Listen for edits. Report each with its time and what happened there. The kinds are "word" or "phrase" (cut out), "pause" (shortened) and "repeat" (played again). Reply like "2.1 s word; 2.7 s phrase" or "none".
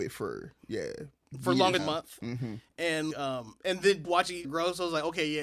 1.8 s word; 3.1 s word; 4.0 s word; 4.4 s word